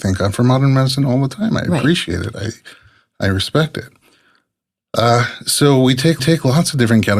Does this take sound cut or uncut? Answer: cut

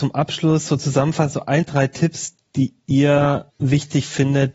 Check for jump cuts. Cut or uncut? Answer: cut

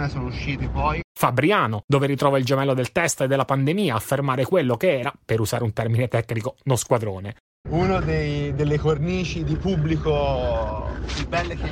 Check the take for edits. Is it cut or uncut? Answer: uncut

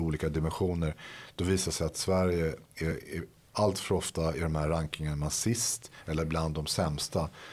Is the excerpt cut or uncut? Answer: uncut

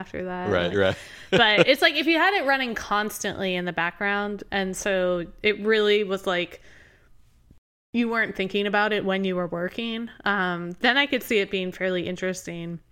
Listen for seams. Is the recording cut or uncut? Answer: uncut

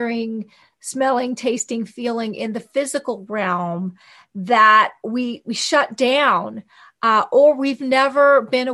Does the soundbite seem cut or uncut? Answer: uncut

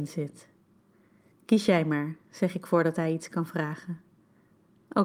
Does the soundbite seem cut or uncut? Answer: uncut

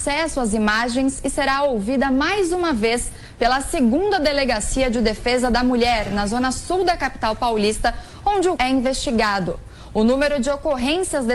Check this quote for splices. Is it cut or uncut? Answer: cut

